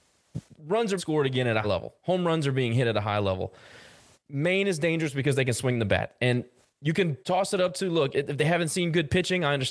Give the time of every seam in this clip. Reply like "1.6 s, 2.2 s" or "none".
1.0 s, 1.6 s, 4.1 s, 7.2 s, 8.1 s